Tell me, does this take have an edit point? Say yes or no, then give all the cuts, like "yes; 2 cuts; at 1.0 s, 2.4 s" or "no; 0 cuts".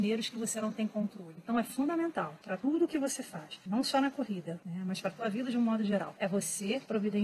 no; 0 cuts